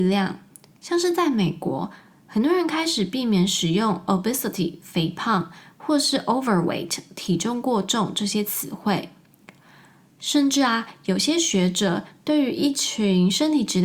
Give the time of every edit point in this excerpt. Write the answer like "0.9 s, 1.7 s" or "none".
none